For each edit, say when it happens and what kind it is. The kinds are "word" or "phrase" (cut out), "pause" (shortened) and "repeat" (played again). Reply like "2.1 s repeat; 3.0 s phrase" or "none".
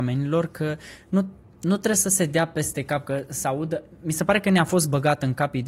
none